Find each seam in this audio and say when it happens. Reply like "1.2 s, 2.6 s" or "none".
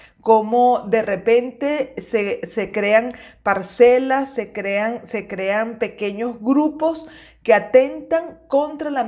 none